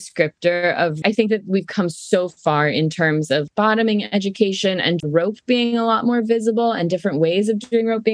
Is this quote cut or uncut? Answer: cut